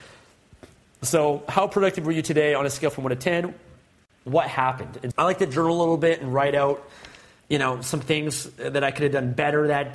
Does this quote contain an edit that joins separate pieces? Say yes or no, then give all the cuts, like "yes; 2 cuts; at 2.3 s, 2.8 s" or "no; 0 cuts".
yes; 2 cuts; at 5.1 s, 7.4 s